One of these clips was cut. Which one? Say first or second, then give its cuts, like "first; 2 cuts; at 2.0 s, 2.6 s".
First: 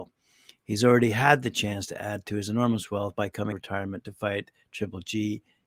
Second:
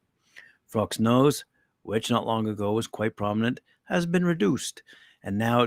first; 1 cut; at 3.5 s